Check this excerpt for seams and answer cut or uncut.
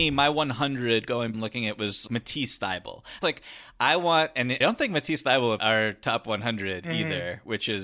cut